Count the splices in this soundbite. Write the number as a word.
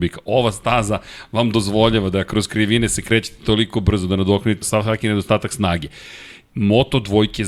one